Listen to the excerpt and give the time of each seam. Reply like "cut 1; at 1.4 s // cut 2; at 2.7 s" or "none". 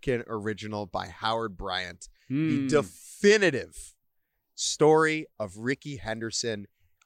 none